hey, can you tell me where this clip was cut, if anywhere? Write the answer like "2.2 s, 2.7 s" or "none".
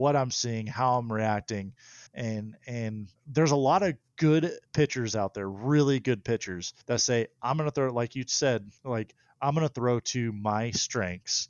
2.1 s, 3.2 s, 4.7 s, 6.8 s, 8.8 s